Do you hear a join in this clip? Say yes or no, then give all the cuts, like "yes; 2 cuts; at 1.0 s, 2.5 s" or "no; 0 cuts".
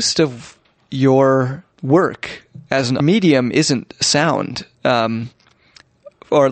yes; 3 cuts; at 1.7 s, 3.0 s, 4.7 s